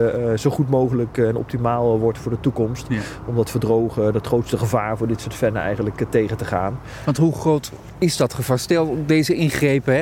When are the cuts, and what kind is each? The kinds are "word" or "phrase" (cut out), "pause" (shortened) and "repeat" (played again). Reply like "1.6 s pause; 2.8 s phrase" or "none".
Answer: none